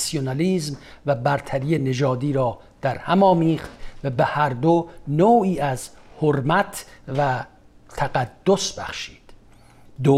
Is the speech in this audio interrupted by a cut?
no; 0 cuts

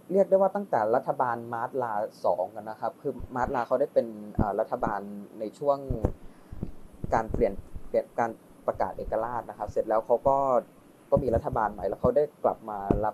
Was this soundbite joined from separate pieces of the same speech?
no; 0 cuts

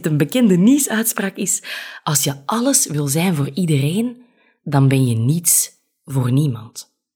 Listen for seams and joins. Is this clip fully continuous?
yes; 0 cuts

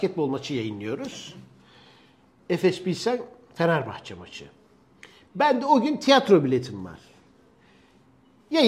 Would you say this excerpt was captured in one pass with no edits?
yes; 0 cuts

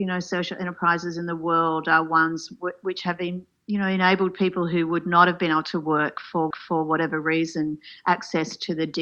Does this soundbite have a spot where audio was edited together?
yes; 1 cut; at 6.5 s

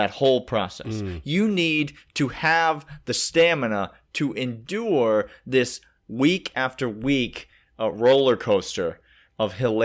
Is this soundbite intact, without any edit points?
yes; 0 cuts

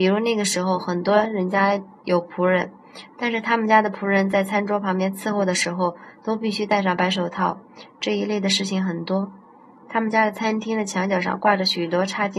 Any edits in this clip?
no; 0 cuts

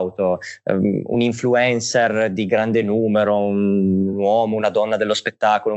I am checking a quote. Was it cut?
no; 0 cuts

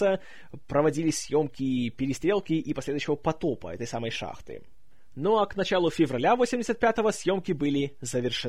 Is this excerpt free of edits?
yes; 0 cuts

